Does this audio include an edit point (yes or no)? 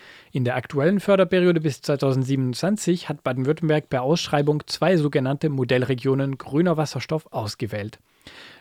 no